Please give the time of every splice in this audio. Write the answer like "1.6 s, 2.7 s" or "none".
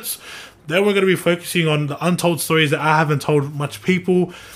none

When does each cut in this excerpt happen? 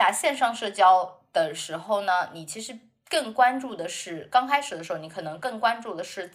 none

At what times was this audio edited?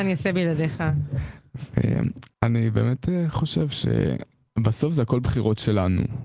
2.3 s

